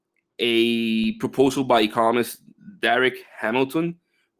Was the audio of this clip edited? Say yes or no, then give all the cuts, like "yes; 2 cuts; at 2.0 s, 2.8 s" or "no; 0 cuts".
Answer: no; 0 cuts